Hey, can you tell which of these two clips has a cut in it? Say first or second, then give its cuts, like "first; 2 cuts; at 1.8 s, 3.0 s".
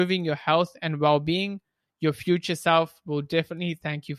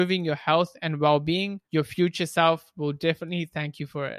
second; 1 cut; at 1.6 s